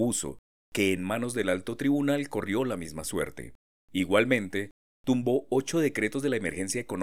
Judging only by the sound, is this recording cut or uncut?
uncut